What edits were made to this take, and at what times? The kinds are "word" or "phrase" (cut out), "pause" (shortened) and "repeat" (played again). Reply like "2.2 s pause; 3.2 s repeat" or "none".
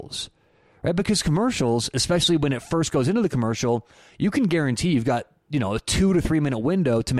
none